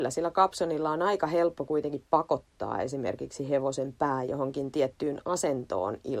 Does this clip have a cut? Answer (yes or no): no